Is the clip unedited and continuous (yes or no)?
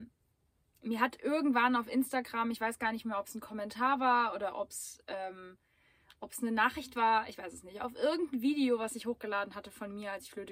yes